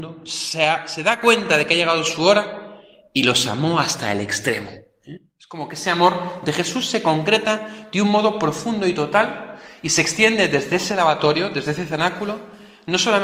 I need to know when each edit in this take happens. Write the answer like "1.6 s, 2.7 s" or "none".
none